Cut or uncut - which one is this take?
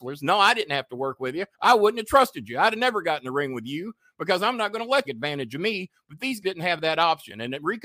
cut